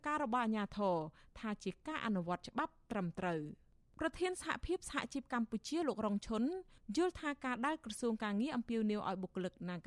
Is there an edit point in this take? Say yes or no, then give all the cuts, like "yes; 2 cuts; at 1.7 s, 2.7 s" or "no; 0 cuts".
no; 0 cuts